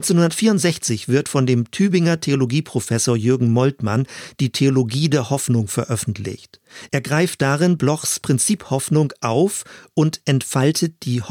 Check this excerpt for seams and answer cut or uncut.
uncut